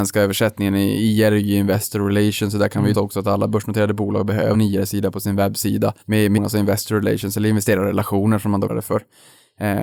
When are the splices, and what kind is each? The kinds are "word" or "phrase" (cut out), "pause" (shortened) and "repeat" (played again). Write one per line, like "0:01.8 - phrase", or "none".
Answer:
0:02.9 - phrase
0:04.5 - word
0:06.0 - pause
0:06.4 - word
0:08.7 - word